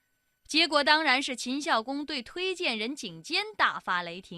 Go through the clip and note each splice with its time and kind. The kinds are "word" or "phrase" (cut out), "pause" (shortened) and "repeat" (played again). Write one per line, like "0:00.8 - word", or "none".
none